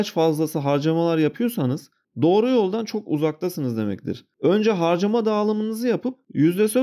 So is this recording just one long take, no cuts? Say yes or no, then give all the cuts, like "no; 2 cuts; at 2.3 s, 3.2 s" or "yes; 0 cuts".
yes; 0 cuts